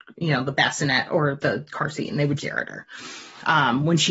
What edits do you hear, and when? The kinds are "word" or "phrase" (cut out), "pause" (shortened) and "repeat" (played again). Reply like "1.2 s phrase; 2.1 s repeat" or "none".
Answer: 1.4 s word; 2.4 s word

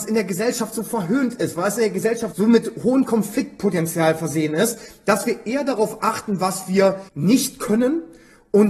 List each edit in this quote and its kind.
2.3 s word; 7.1 s pause

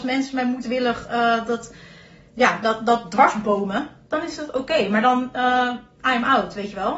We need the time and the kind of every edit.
none

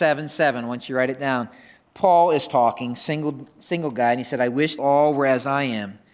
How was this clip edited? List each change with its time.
4.8 s phrase

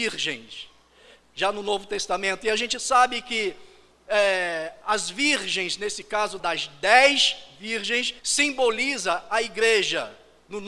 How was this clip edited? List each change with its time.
6.4 s phrase; 8.2 s pause

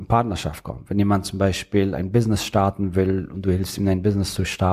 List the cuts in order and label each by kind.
none

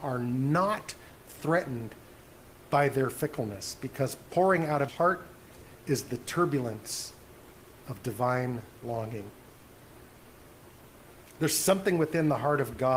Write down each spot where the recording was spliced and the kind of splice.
4.9 s word

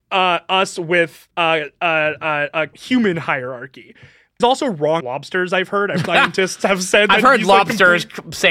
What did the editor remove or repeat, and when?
1.3 s pause; 2.7 s phrase; 4.4 s phrase; 5.0 s word; 6.0 s phrase

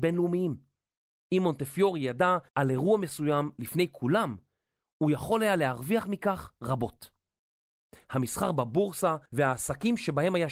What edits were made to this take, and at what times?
2.5 s pause; 9.3 s pause

